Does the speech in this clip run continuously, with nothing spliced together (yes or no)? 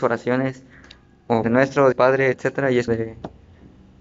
no